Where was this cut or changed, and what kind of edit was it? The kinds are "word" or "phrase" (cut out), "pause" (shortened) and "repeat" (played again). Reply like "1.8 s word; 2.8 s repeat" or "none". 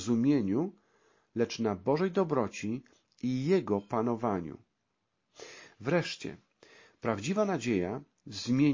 none